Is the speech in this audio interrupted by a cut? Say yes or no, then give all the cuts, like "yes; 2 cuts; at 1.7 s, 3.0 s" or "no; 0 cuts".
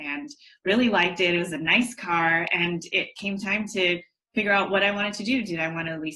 no; 0 cuts